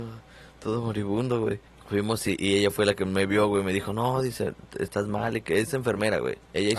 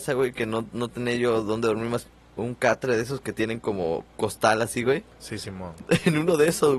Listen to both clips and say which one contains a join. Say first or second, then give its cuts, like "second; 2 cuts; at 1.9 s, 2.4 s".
first; 1 cut; at 1.7 s